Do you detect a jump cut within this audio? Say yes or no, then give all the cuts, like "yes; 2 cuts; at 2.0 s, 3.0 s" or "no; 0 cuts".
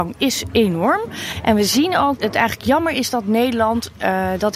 yes; 1 cut; at 2.2 s